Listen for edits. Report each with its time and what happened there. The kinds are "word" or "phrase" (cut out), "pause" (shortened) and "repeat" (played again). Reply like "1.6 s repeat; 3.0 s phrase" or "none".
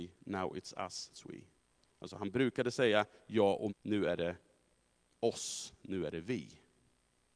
1.1 s word; 3.7 s word

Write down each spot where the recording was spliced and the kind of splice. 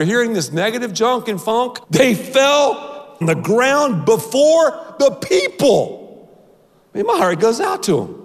1.8 s pause; 3.2 s phrase

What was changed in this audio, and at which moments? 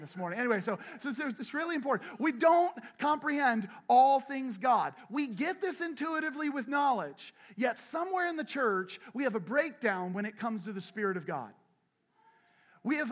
none

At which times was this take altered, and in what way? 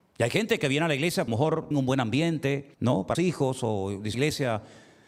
1.3 s phrase; 1.7 s word; 2.7 s pause; 3.1 s word; 4.1 s phrase

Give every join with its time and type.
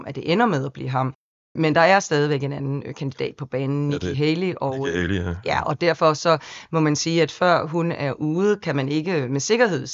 none

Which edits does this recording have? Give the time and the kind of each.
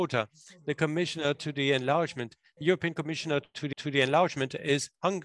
3.7 s repeat

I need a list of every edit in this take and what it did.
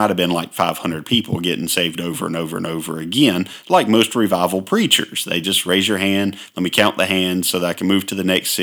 none

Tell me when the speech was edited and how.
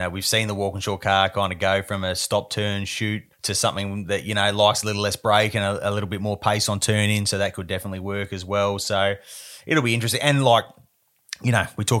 3.3 s pause

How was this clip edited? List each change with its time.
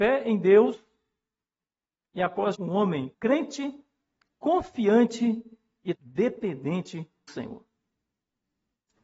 2.5 s word; 3.1 s word; 6.0 s word; 7.3 s word

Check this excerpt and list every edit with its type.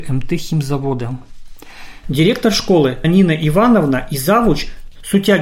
3.0 s word

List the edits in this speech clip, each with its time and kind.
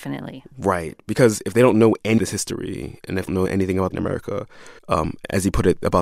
2.2 s word; 3.3 s word; 3.9 s phrase; 4.8 s pause

